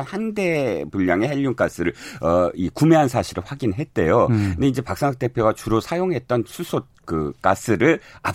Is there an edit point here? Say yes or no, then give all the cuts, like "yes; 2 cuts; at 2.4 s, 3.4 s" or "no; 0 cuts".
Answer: no; 0 cuts